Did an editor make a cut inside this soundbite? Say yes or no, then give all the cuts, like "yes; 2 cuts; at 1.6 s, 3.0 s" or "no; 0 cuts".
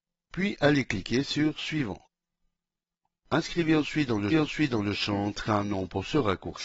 yes; 1 cut; at 4.3 s